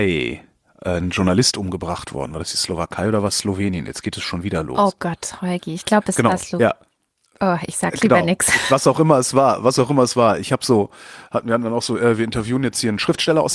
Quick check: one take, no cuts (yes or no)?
yes